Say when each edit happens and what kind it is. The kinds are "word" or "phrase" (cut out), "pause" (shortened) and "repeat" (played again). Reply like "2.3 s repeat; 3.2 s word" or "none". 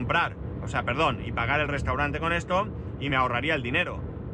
none